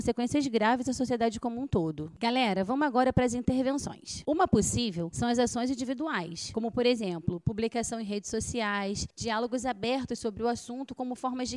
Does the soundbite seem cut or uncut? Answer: cut